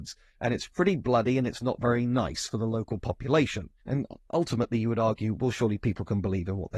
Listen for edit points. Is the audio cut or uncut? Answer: cut